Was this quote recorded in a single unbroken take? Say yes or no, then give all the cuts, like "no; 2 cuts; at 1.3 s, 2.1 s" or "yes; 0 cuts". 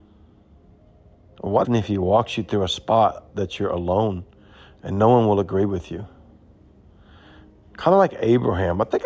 no; 1 cut; at 1.6 s